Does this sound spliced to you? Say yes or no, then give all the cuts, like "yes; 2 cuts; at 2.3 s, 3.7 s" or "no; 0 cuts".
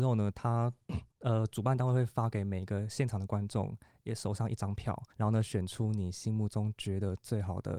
yes; 2 cuts; at 1.1 s, 5.1 s